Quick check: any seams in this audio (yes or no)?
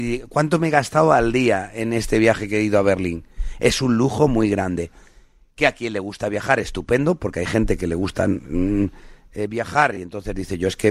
no